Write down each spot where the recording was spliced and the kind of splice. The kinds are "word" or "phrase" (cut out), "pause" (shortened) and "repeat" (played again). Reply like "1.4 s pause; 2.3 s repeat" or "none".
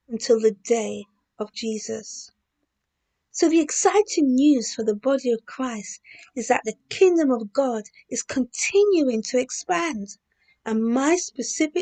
1.5 s word